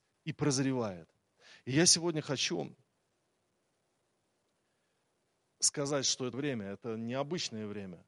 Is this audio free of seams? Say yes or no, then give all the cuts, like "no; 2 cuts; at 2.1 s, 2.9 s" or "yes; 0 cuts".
no; 1 cut; at 6.3 s